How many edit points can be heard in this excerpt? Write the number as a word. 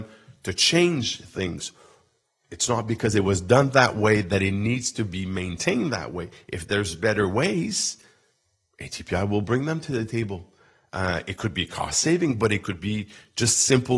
zero